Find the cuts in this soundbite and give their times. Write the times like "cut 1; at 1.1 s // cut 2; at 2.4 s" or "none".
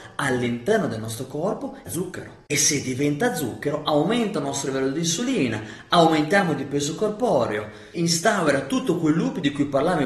cut 1; at 1.9 s // cut 2; at 7.9 s